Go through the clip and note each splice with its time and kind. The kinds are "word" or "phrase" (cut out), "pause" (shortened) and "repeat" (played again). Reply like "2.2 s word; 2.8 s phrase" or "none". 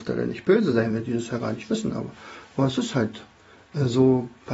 none